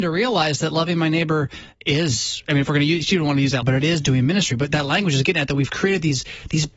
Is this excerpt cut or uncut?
cut